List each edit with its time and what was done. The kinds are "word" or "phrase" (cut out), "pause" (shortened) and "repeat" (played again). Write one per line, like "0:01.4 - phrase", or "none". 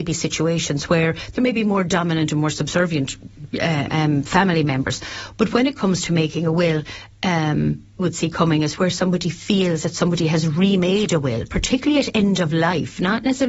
0:03.9 - word
0:08.0 - phrase